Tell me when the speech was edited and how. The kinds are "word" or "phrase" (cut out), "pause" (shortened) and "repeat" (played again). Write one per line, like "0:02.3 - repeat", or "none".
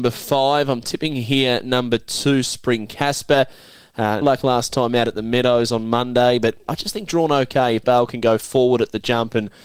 0:04.2 - word
0:06.7 - word
0:07.8 - word